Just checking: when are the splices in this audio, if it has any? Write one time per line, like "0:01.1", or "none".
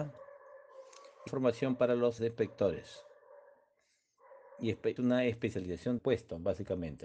0:01.3
0:02.2
0:05.0
0:06.0